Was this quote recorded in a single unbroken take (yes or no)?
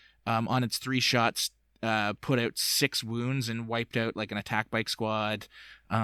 yes